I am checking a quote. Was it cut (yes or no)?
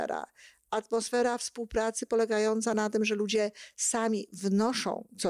no